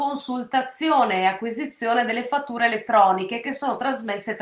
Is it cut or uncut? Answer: uncut